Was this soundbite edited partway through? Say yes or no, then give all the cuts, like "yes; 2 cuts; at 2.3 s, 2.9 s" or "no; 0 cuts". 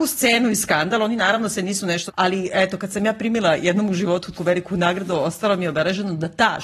yes; 2 cuts; at 2.1 s, 4.4 s